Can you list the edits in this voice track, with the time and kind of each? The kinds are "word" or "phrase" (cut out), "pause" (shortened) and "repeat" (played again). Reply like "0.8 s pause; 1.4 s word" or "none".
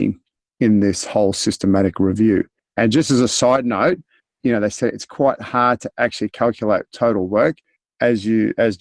none